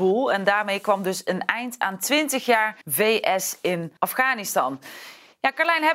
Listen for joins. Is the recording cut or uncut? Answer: cut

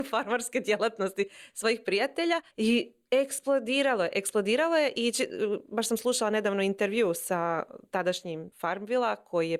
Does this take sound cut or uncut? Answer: cut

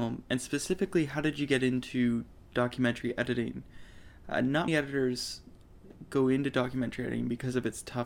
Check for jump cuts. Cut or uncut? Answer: cut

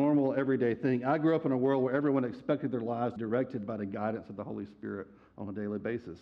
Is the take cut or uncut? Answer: cut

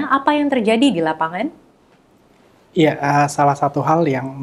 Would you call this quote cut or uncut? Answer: uncut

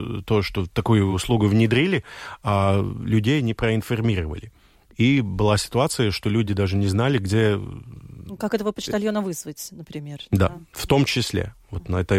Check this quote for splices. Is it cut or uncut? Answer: uncut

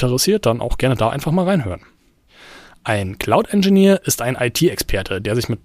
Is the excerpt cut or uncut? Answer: uncut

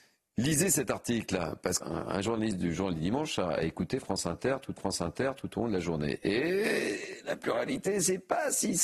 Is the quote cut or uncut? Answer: cut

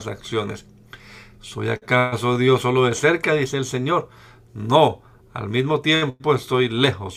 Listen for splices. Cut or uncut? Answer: uncut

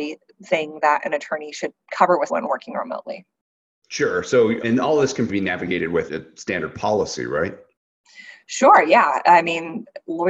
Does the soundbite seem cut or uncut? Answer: cut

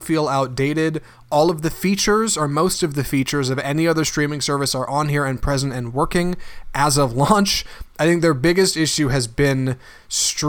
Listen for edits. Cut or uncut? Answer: uncut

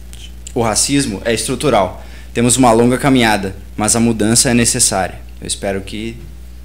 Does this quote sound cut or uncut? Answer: uncut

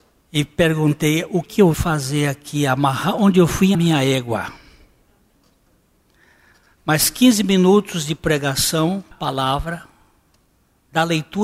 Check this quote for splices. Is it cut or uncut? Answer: cut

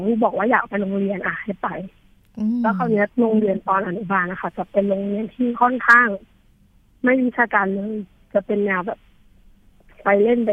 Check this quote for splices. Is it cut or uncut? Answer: uncut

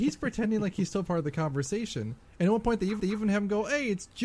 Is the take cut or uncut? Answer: cut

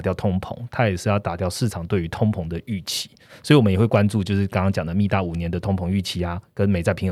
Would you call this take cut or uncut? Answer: uncut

